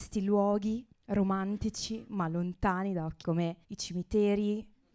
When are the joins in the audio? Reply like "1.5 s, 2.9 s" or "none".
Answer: 0.9 s, 3.2 s, 3.6 s